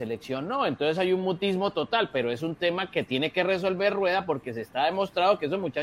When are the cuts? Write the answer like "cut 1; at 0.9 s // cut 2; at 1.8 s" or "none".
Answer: none